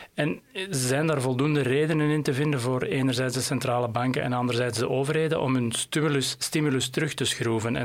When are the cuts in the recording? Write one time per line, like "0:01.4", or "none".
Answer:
none